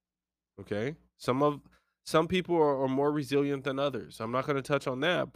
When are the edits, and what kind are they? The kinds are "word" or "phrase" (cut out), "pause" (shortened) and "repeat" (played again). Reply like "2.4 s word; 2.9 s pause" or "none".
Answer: none